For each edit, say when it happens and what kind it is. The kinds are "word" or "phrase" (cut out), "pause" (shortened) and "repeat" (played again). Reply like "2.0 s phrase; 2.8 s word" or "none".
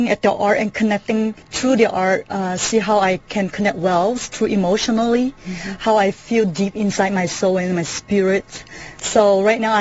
1.4 s pause